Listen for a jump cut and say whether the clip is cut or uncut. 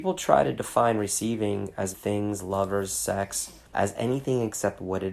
cut